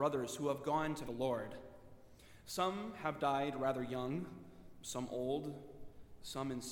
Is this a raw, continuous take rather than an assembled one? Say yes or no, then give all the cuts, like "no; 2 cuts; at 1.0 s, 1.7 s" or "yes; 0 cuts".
no; 1 cut; at 1.0 s